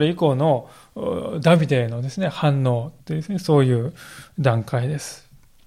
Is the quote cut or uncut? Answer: cut